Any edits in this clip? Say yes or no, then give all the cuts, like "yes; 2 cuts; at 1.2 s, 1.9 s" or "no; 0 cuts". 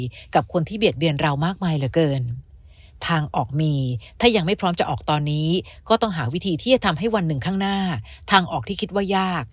no; 0 cuts